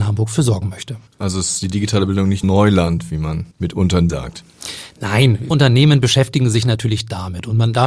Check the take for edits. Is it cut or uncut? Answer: cut